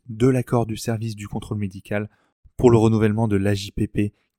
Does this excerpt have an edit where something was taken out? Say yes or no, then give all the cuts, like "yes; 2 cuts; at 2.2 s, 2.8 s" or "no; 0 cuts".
no; 0 cuts